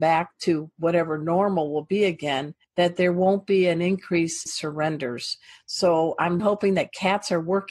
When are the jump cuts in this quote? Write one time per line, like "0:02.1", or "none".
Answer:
0:02.6
0:04.5
0:06.4